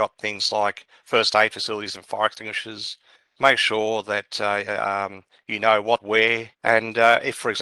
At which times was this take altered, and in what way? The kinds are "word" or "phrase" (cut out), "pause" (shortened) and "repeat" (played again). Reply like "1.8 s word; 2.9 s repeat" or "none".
3.2 s pause; 6.0 s phrase; 6.5 s pause